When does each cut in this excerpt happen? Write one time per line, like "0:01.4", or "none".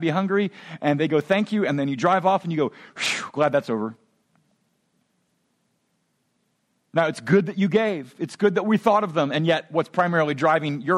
none